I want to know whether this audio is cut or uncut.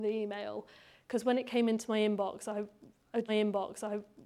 cut